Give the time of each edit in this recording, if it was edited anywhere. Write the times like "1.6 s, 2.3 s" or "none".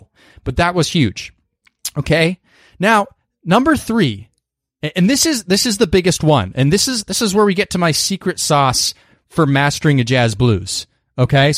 none